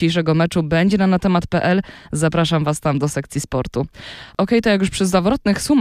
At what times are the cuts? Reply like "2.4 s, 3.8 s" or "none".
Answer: none